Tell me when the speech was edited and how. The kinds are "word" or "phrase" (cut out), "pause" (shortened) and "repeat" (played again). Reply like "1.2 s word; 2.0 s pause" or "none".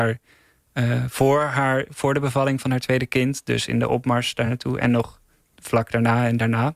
none